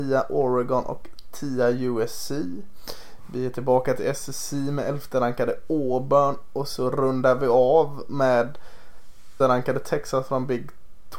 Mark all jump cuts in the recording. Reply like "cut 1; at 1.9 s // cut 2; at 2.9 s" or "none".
cut 1; at 9.4 s